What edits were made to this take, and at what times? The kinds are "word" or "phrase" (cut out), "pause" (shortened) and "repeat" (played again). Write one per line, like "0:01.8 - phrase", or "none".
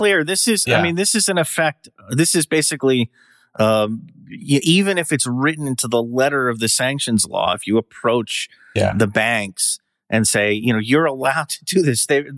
none